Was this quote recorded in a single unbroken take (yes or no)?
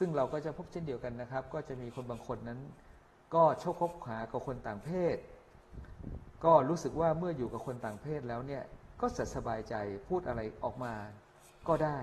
yes